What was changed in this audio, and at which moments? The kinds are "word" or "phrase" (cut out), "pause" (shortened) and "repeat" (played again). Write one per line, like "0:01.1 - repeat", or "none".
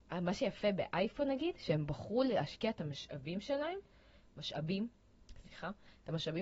none